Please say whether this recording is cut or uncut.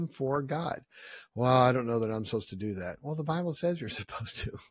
uncut